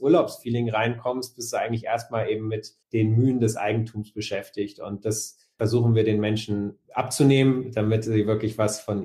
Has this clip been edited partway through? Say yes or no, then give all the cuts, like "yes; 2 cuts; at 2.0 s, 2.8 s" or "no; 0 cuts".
yes; 1 cut; at 2.8 s